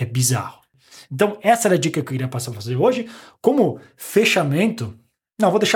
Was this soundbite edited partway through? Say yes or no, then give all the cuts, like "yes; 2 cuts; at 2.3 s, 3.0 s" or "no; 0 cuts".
no; 0 cuts